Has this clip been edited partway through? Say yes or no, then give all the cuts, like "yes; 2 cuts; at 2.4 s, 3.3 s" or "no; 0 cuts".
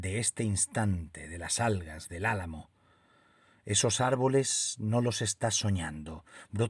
no; 0 cuts